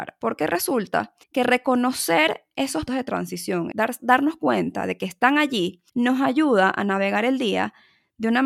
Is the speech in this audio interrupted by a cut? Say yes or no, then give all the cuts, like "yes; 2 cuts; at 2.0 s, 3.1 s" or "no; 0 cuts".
yes; 4 cuts; at 1.2 s, 2.9 s, 3.7 s, 5.9 s